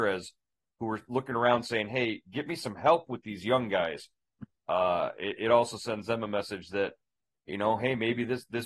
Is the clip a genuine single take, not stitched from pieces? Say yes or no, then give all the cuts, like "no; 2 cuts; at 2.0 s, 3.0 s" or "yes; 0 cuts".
yes; 0 cuts